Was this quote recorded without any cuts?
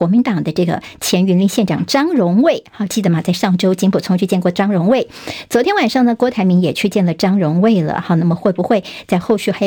yes; 0 cuts

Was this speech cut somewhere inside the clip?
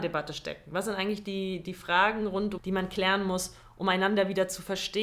yes; 1 cut; at 2.6 s

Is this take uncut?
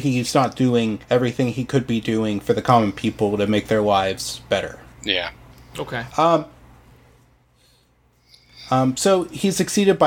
no; 2 cuts; at 1.0 s, 5.5 s

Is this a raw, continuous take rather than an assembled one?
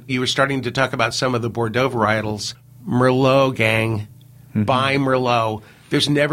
yes; 0 cuts

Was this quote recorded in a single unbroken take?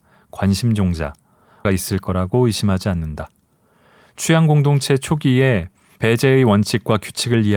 no; 1 cut; at 1.6 s

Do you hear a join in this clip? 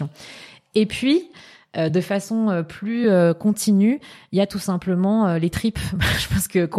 no; 0 cuts

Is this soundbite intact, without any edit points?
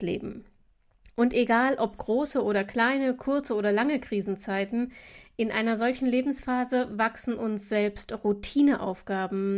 yes; 0 cuts

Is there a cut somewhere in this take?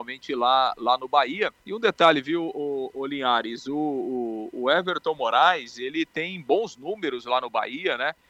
yes; 1 cut; at 1.6 s

